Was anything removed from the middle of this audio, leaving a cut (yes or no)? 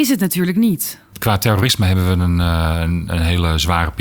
no